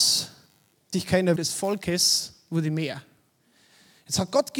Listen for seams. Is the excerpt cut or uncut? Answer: cut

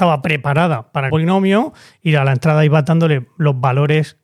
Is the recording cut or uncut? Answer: cut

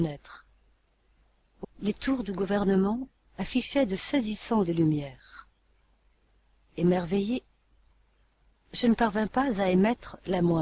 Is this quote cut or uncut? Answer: cut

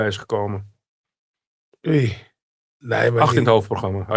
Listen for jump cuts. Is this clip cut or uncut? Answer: uncut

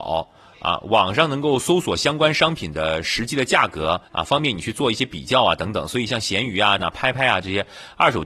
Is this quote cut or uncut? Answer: cut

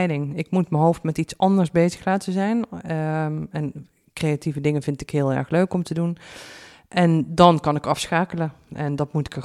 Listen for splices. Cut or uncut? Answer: uncut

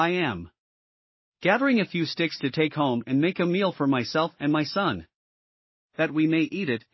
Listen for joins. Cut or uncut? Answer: uncut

